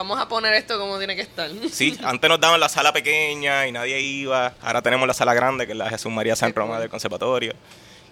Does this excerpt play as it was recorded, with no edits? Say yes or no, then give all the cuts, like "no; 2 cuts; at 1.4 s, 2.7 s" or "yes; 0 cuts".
yes; 0 cuts